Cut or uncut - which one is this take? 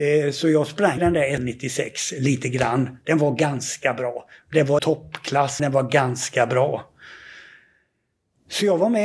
cut